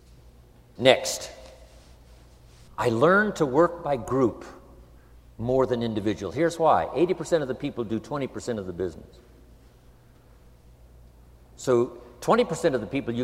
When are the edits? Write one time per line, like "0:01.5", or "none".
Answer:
none